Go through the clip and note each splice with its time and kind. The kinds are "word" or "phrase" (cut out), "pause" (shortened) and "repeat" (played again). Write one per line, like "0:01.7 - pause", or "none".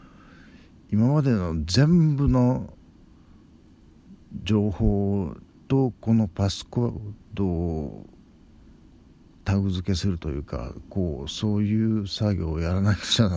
none